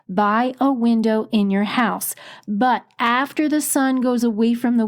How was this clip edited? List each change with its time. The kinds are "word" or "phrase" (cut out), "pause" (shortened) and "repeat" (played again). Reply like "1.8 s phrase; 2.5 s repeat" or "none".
none